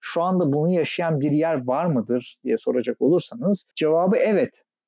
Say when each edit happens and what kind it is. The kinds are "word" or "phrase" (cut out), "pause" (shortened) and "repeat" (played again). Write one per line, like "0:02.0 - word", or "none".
0:03.7 - pause